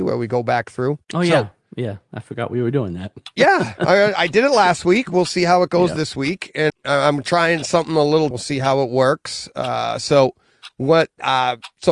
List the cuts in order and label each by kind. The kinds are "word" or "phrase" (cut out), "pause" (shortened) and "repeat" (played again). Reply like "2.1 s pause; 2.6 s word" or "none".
1.0 s pause; 6.7 s word; 8.3 s phrase